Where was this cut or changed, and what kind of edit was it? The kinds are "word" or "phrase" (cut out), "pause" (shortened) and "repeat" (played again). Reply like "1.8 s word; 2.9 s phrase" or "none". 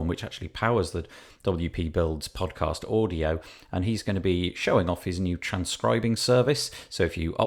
none